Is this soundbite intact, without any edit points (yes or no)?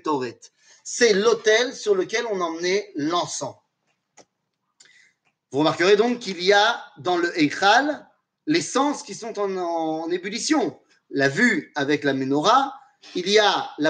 yes